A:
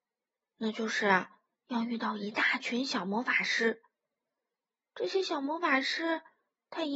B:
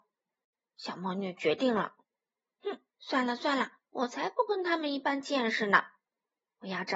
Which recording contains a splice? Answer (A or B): B